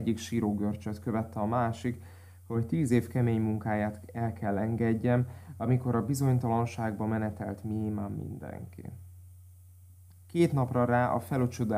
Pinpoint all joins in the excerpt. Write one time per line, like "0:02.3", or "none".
none